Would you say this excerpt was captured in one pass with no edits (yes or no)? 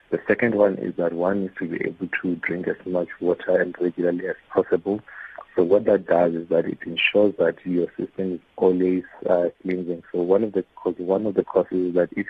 yes